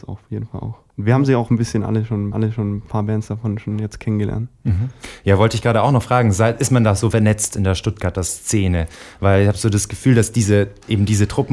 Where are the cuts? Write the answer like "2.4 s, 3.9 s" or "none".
2.3 s